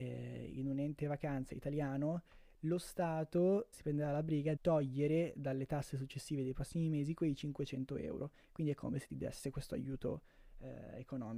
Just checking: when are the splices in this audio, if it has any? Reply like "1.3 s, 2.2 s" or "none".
3.7 s, 4.6 s